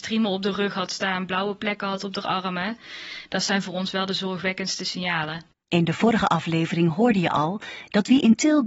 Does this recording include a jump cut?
no; 0 cuts

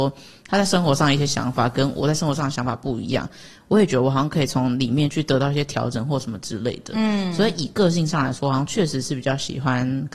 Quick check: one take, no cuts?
yes; 0 cuts

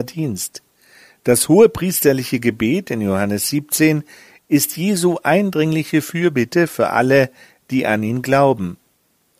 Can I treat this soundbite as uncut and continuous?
yes; 0 cuts

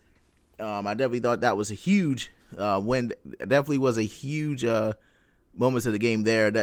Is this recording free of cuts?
yes; 0 cuts

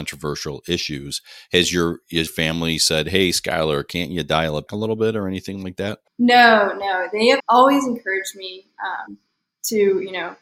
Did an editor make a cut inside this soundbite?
yes; 3 cuts; at 2.3 s, 4.7 s, 7.4 s

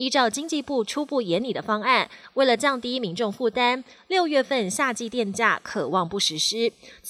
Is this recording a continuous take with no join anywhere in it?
yes; 0 cuts

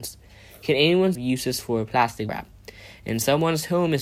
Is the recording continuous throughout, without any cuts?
no; 2 cuts; at 1.1 s, 2.3 s

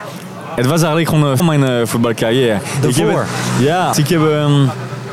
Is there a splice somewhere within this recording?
yes; 2 cuts; at 1.4 s, 3.9 s

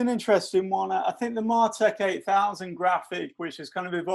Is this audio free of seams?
yes; 0 cuts

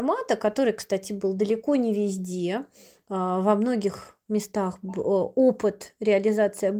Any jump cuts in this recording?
no; 0 cuts

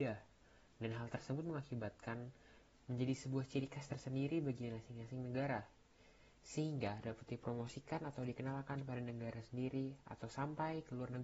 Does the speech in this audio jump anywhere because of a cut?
no; 0 cuts

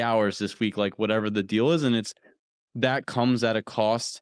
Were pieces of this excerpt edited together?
no; 0 cuts

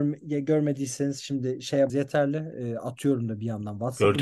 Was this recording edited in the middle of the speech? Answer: yes; 1 cut; at 1.9 s

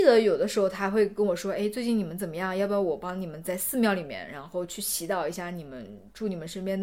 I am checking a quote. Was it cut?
no; 0 cuts

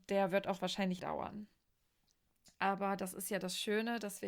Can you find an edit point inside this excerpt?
yes; 1 cut; at 1.0 s

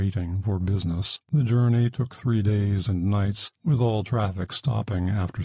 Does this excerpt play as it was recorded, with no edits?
no; 2 cuts; at 1.2 s, 3.6 s

